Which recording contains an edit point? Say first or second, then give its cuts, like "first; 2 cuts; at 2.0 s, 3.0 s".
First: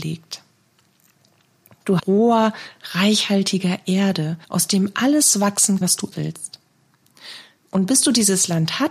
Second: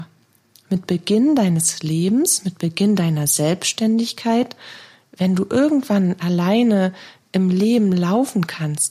first; 4 cuts; at 2.0 s, 4.4 s, 5.8 s, 6.1 s